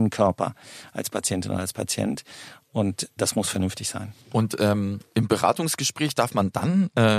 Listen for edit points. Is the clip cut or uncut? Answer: cut